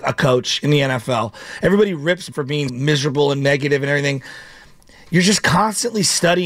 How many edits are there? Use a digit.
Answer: 2